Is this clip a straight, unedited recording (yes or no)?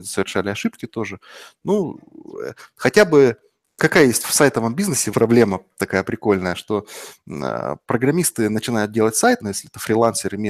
no